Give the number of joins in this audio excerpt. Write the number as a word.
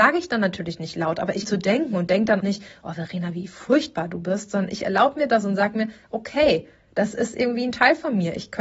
two